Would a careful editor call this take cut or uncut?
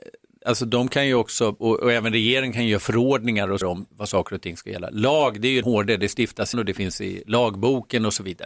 cut